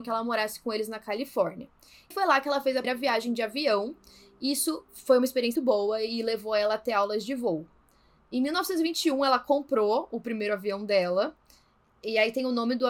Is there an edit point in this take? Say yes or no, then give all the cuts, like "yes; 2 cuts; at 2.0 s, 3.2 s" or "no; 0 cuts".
yes; 3 cuts; at 2.1 s, 2.8 s, 5.6 s